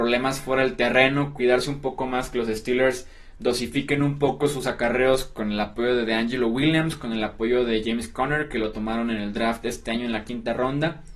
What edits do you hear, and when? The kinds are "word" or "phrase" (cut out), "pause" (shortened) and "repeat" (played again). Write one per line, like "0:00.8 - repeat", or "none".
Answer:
none

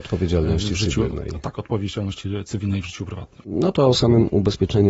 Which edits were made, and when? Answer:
none

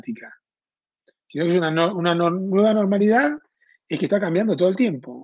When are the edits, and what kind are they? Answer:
none

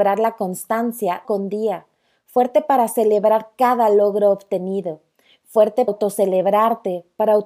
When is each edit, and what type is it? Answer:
0:01.2 - word
0:05.9 - word

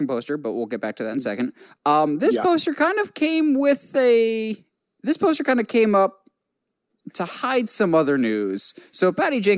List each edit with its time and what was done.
none

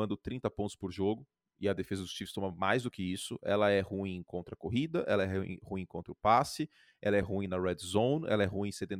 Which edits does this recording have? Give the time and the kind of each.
none

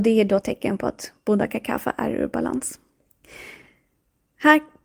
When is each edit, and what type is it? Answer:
none

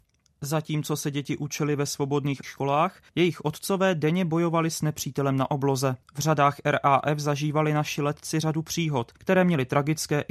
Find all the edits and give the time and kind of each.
0:02.4 - word
0:03.1 - pause
0:06.0 - pause
0:09.2 - pause

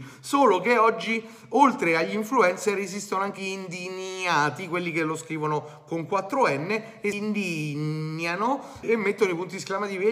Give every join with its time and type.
0:03.4 - word
0:07.1 - word
0:08.8 - word

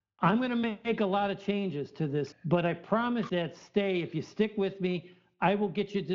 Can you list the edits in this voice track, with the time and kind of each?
0:02.3 - word
0:03.3 - phrase

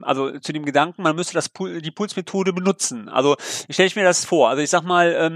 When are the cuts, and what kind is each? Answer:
none

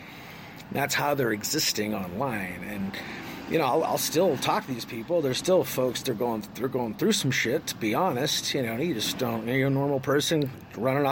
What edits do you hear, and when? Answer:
none

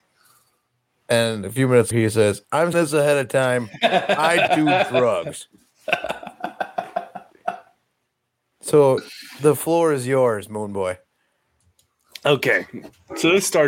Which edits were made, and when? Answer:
0:01.9 - word
0:02.7 - word
0:04.5 - word

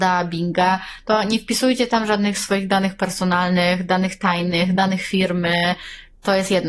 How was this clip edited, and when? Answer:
none

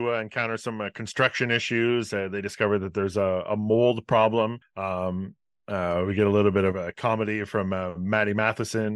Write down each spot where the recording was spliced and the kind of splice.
0:04.6 - pause

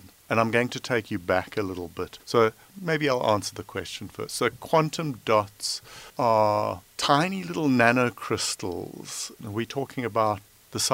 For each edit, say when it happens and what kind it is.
0:02.2 - pause
0:06.1 - pause

